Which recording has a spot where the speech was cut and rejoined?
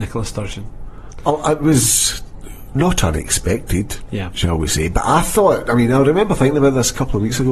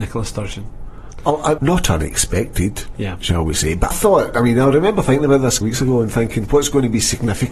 second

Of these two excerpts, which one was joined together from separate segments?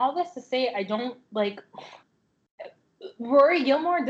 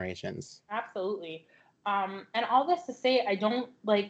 first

